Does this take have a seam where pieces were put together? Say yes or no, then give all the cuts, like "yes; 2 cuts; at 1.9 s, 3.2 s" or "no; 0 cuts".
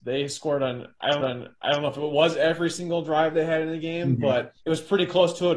yes; 2 cuts; at 1.2 s, 4.6 s